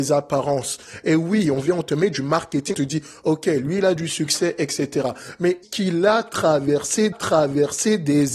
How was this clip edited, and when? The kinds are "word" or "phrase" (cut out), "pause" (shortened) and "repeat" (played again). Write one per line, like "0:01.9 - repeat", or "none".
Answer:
0:02.7 - word
0:05.6 - word
0:07.1 - repeat

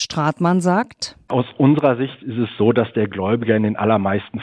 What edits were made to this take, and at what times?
none

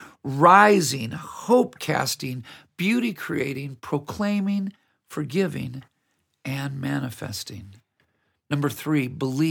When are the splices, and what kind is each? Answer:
none

